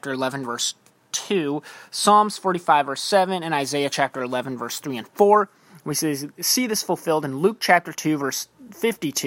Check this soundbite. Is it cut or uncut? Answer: uncut